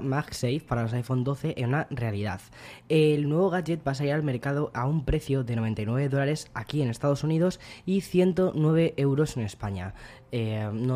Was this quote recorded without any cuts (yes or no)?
yes